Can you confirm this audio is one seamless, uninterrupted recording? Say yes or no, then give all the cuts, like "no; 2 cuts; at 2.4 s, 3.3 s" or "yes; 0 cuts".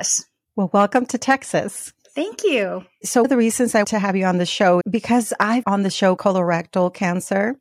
no; 5 cuts; at 3.2 s, 3.8 s, 4.8 s, 5.6 s, 6.2 s